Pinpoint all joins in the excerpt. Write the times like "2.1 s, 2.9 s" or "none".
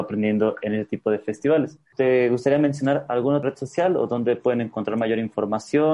1.9 s